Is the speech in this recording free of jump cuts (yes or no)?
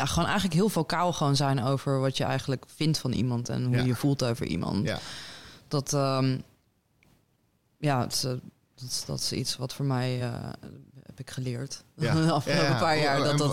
yes